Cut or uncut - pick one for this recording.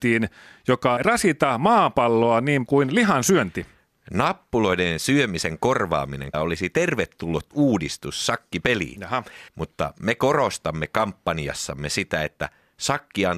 cut